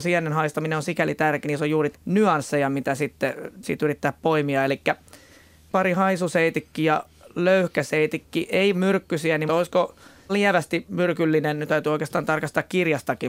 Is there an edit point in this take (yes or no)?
yes